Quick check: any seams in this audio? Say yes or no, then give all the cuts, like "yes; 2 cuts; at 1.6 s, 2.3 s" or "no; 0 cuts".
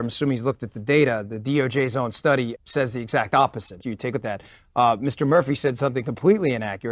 yes; 3 cuts; at 2.6 s, 3.8 s, 4.1 s